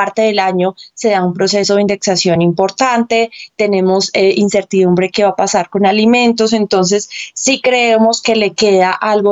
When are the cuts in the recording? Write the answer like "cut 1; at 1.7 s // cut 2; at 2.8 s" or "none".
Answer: none